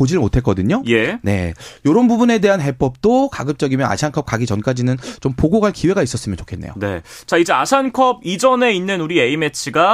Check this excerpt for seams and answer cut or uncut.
uncut